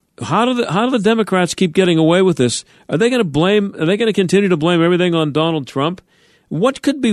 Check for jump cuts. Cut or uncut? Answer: uncut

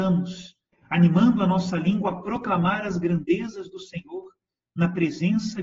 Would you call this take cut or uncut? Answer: uncut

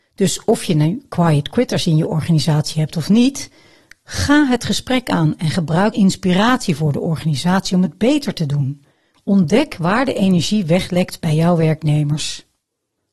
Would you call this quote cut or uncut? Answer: cut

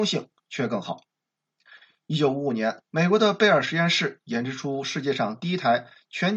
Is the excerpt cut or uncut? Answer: cut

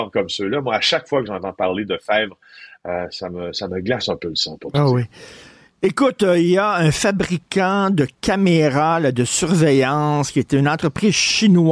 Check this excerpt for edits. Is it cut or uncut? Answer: uncut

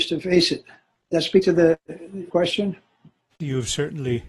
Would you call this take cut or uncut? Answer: cut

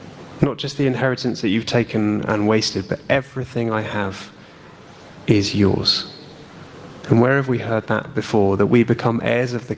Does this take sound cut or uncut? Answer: uncut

